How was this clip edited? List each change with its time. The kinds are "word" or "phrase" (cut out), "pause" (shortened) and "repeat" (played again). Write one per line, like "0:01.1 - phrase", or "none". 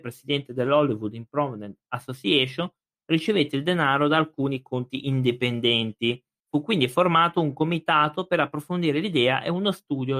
0:06.4 - pause

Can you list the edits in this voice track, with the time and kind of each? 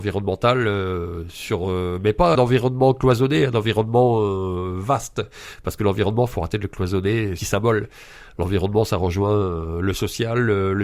0:02.3 - word
0:07.4 - phrase

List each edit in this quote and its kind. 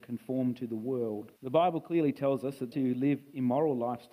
0:01.4 - pause
0:02.7 - word

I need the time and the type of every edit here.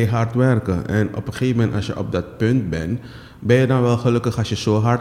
none

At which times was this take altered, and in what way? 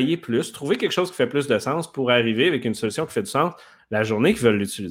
none

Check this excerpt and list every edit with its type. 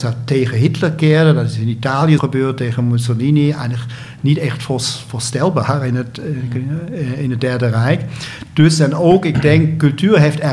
0:02.2 - word

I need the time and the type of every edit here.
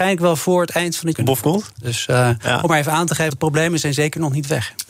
0:01.1 - phrase
0:03.3 - word

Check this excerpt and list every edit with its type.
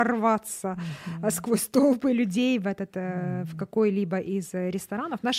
none

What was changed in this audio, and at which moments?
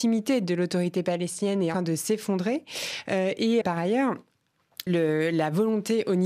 0:01.7 - phrase
0:03.6 - word
0:04.9 - word

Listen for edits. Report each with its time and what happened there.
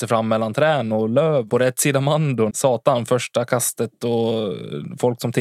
0:01.5 - word
0:02.5 - word

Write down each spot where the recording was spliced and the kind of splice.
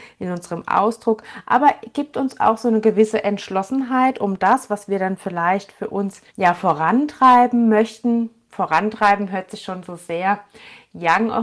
0:06.3 - pause

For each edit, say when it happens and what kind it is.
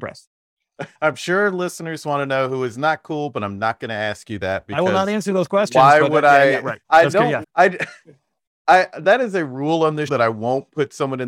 0:00.9 - pause
0:06.8 - pause
0:07.4 - word
0:10.1 - word

